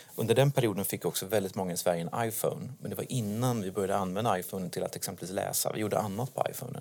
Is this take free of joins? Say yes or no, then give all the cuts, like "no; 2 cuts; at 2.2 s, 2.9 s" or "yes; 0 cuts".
yes; 0 cuts